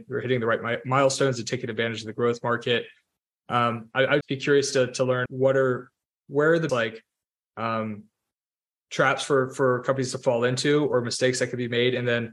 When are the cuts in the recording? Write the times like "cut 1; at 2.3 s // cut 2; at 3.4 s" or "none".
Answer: cut 1; at 4.2 s // cut 2; at 5.3 s // cut 3; at 6.7 s